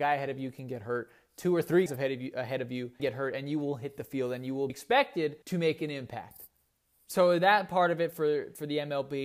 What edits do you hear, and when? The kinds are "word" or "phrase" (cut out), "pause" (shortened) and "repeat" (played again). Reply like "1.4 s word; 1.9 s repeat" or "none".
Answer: 1.9 s word; 3.0 s word; 4.7 s word; 5.4 s pause; 6.8 s pause